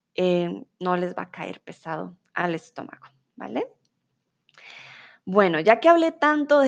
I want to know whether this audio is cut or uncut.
uncut